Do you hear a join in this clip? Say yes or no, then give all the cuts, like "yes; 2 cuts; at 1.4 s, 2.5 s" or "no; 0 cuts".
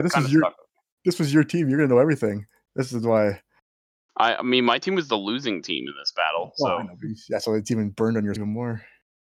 yes; 1 cut; at 8.4 s